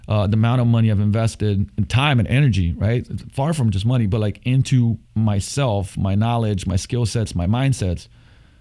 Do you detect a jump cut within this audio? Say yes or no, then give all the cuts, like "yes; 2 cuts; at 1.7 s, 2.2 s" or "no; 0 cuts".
yes; 1 cut; at 5.1 s